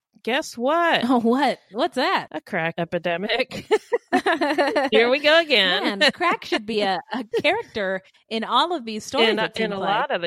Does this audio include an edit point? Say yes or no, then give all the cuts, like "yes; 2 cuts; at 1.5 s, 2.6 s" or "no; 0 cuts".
no; 0 cuts